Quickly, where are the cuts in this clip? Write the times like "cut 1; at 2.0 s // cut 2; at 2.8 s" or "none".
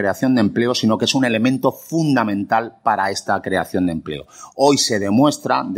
none